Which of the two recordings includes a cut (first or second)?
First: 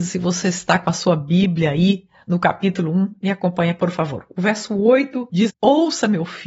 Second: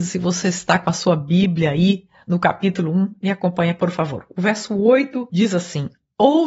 first